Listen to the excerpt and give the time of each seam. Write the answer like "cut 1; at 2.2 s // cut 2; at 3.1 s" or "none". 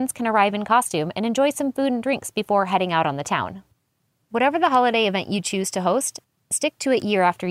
none